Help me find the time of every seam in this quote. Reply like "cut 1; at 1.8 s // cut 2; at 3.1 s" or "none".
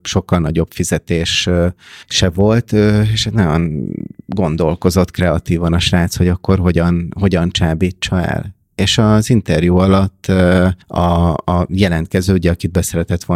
cut 1; at 2.0 s // cut 2; at 10.8 s